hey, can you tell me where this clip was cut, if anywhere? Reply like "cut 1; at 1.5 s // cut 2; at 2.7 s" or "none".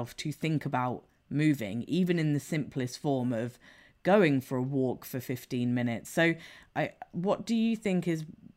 none